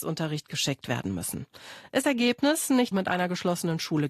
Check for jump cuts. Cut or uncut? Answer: cut